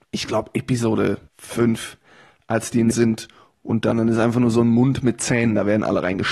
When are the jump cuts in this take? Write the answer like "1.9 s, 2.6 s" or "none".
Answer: 1.3 s, 2.9 s, 3.9 s